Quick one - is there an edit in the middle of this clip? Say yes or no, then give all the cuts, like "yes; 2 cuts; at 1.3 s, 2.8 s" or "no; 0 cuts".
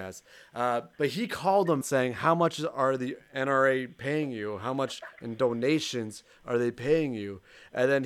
yes; 2 cuts; at 0.9 s, 1.8 s